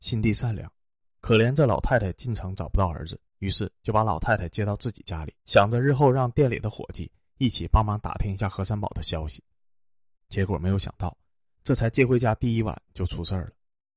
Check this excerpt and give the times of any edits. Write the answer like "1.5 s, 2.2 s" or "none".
3.3 s, 5.4 s